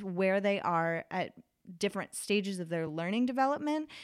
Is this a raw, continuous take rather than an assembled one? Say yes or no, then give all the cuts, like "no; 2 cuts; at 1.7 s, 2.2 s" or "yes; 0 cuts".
yes; 0 cuts